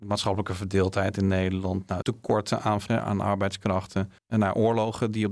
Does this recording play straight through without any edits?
no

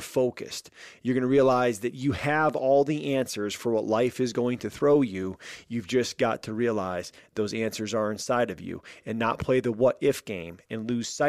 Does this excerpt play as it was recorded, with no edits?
yes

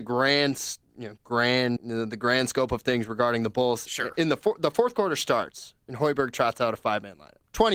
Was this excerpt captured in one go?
no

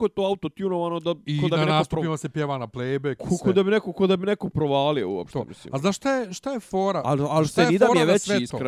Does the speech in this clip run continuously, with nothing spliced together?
yes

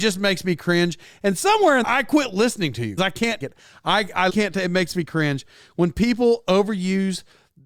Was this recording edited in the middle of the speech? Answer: yes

